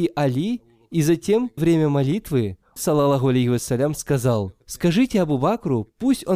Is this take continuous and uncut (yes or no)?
no